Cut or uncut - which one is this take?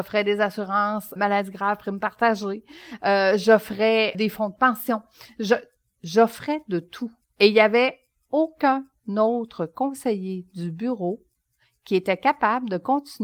cut